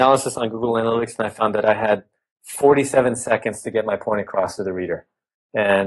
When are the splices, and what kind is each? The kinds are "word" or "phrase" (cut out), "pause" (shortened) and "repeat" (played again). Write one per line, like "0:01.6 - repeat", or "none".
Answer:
none